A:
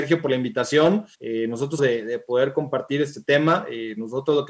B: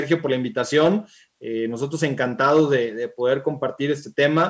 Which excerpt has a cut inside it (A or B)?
A